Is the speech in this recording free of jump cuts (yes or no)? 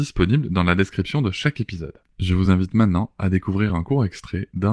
yes